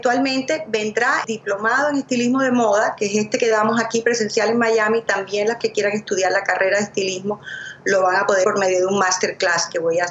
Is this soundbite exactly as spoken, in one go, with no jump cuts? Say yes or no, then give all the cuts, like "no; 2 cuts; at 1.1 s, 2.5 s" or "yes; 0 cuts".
no; 3 cuts; at 1.2 s, 5.6 s, 8.4 s